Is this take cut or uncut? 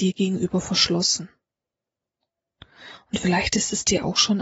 uncut